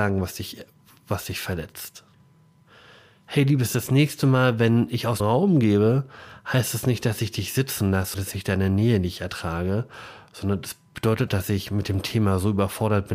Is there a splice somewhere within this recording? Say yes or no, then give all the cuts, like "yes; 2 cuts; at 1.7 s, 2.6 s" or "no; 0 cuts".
yes; 3 cuts; at 5.2 s, 8.1 s, 11.3 s